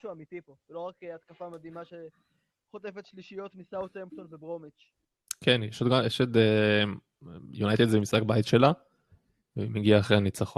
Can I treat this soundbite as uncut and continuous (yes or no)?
yes